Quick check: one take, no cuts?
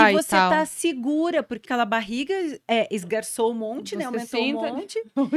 no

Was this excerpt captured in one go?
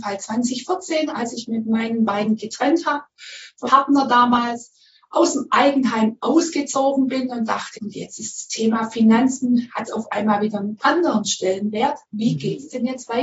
no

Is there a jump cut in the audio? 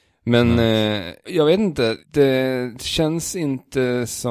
yes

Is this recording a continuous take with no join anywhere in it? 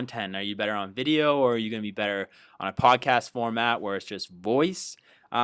yes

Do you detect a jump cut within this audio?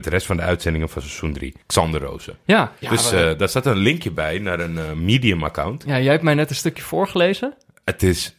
yes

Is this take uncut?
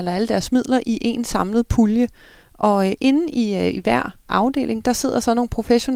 yes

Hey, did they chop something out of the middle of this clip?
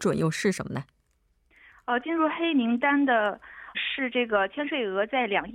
yes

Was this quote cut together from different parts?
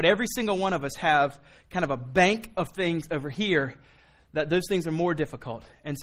no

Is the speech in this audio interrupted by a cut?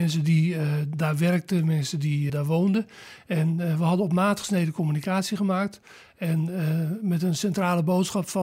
yes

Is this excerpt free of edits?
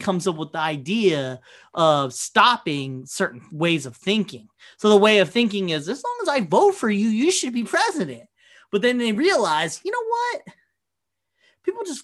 yes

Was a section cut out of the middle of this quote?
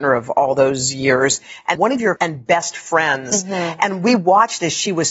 yes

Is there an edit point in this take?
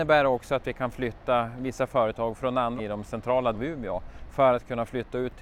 yes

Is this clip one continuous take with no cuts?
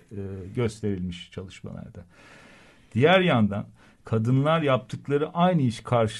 yes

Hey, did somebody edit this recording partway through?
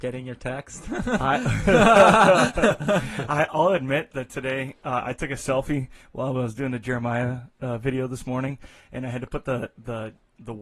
no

